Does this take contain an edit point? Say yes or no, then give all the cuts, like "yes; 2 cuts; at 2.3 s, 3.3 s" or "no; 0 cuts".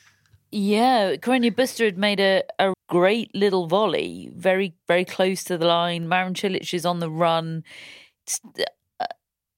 yes; 2 cuts; at 2.7 s, 4.8 s